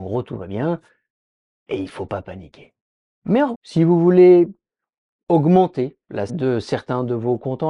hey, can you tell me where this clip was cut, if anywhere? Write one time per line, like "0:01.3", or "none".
0:03.5
0:06.3